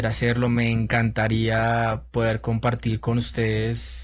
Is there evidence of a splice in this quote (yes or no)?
no